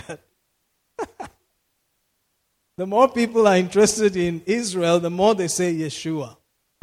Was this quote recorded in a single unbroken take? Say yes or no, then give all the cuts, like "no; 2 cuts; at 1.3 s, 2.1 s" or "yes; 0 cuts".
yes; 0 cuts